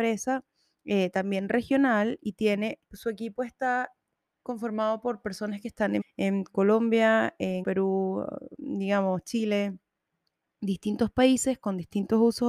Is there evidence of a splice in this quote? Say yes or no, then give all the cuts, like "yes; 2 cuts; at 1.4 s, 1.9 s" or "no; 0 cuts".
yes; 3 cuts; at 2.8 s, 6.0 s, 7.6 s